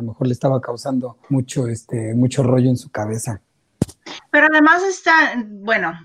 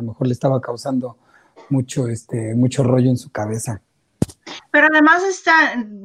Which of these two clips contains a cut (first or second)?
first